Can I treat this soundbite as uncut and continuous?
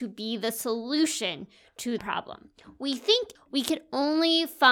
no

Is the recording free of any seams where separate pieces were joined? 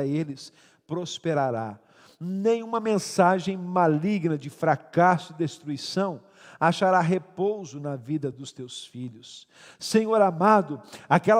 yes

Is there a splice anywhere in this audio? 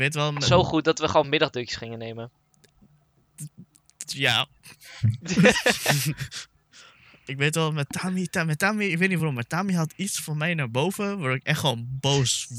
no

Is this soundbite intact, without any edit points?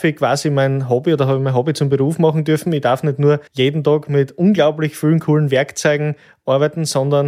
no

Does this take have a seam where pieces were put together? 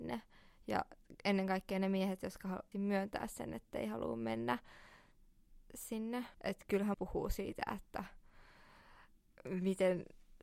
yes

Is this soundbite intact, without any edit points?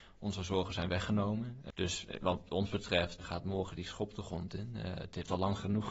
no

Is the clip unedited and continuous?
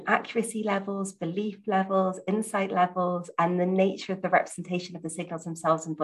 yes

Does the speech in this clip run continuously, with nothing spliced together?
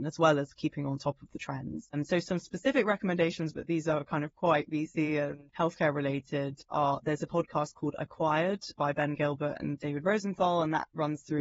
yes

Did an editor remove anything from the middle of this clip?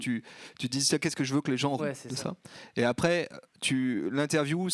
yes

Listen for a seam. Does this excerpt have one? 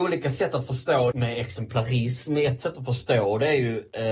yes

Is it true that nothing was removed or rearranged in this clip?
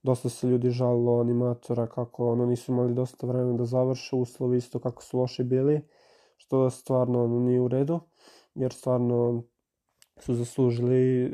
yes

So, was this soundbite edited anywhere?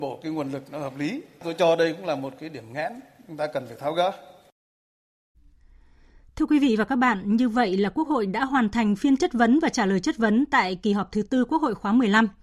no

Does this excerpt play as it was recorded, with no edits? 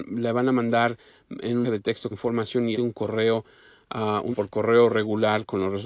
no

